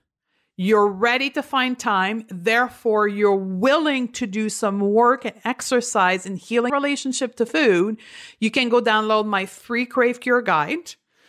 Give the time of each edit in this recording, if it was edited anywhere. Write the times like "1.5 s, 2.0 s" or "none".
6.7 s